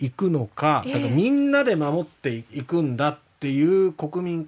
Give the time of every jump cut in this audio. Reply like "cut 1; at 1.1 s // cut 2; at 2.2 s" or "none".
cut 1; at 2.5 s

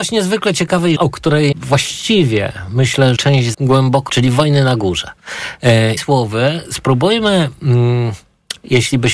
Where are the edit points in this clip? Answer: cut 1; at 1.0 s // cut 2; at 1.5 s // cut 3; at 3.2 s // cut 4; at 3.5 s // cut 5; at 4.1 s // cut 6; at 6.0 s

